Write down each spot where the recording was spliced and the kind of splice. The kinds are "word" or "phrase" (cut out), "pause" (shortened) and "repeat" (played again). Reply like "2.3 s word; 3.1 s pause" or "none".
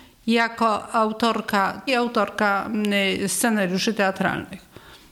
1.9 s phrase